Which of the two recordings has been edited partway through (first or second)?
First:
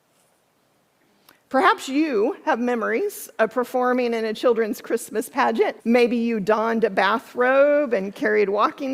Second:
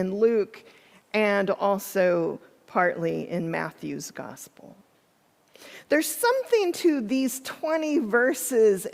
first